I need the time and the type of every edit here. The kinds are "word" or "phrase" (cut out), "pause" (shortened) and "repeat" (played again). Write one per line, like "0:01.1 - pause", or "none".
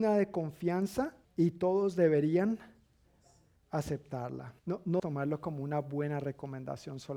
0:01.2 - pause
0:04.6 - pause
0:05.0 - word